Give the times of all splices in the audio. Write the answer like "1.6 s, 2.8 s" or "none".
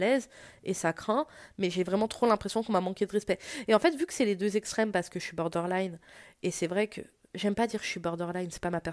none